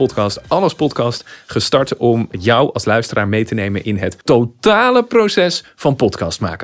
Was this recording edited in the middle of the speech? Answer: yes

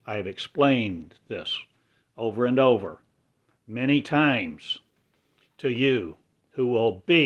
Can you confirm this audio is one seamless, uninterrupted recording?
yes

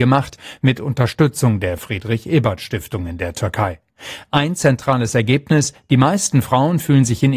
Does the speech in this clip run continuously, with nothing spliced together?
yes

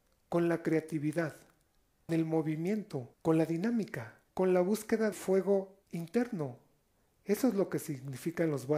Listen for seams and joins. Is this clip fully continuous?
no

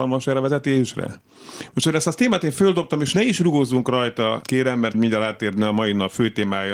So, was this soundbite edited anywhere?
yes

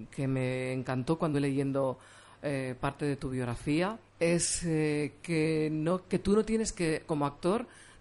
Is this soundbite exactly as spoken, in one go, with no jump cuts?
no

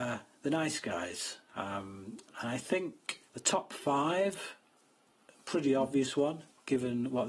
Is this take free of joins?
no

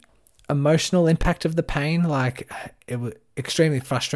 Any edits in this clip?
no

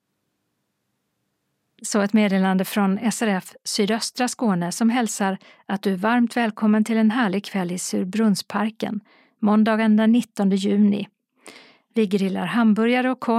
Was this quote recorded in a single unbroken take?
yes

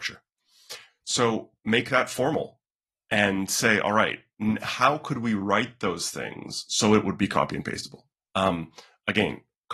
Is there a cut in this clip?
no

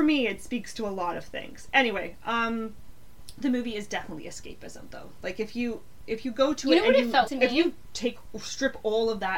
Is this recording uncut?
no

